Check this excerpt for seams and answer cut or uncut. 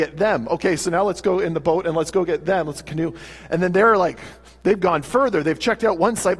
uncut